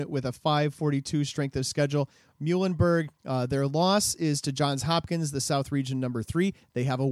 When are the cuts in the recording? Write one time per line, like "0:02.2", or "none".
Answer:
0:03.2